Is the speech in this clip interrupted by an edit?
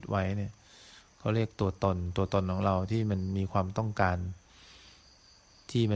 no; 0 cuts

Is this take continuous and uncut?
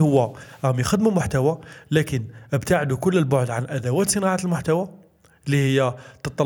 yes; 0 cuts

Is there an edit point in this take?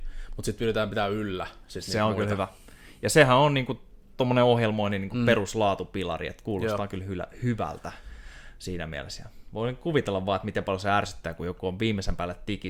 no; 0 cuts

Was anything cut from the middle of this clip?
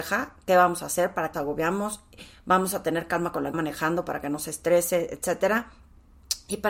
yes; 2 cuts; at 1.3 s, 3.5 s

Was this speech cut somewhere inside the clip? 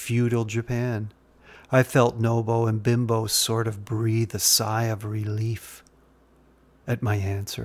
no; 0 cuts

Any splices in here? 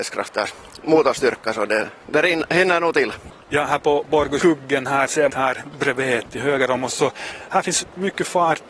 yes; 3 cuts; at 3.4 s, 4.4 s, 5.3 s

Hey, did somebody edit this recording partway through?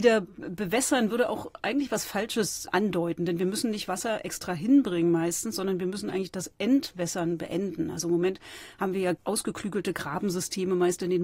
no; 0 cuts

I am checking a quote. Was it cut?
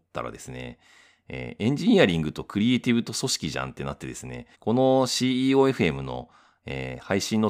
yes; 1 cut; at 4.5 s

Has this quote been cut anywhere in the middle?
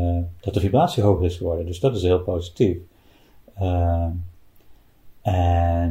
no; 0 cuts

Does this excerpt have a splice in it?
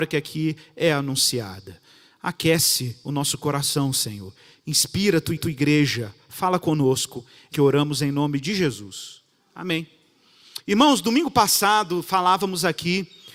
yes; 3 cuts; at 5.4 s, 7.5 s, 10.6 s

